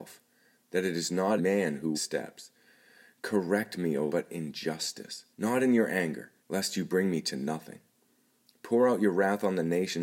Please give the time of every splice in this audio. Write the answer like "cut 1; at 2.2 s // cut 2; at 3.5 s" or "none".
cut 1; at 1.4 s // cut 2; at 1.9 s // cut 3; at 4.1 s // cut 4; at 5.3 s // cut 5; at 6.4 s